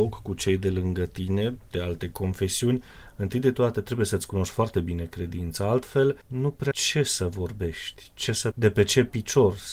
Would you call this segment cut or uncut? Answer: cut